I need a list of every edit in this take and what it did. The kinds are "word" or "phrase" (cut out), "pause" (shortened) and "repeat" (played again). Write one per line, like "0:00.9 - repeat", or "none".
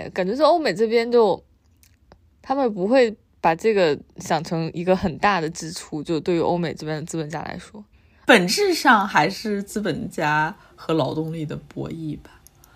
0:03.3 - pause